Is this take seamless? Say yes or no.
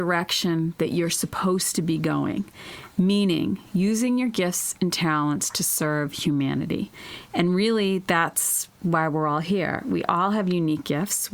yes